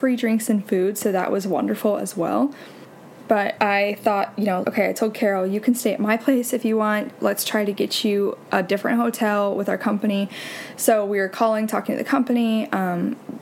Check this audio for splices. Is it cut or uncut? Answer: cut